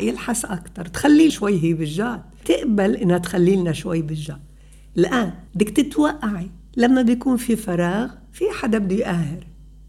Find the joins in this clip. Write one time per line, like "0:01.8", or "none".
0:01.3
0:02.4
0:05.5